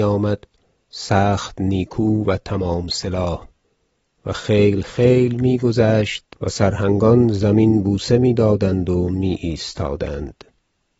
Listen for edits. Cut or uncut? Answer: uncut